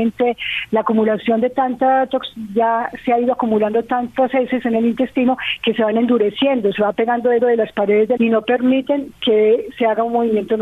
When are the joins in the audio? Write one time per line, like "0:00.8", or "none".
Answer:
0:07.4
0:08.2